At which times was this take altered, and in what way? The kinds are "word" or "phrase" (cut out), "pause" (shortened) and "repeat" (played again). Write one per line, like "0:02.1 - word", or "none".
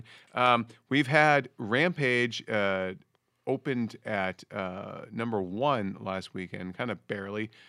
none

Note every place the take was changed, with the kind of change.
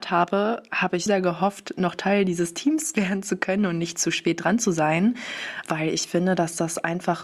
0:01.1 - word
0:05.6 - word

